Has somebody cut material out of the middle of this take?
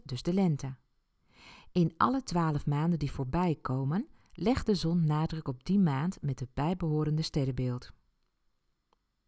no; 0 cuts

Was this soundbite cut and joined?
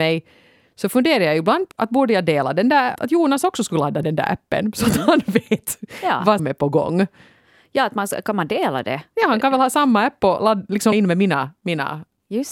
yes; 6 cuts; at 1.7 s, 3.0 s, 4.0 s, 6.4 s, 10.4 s, 10.9 s

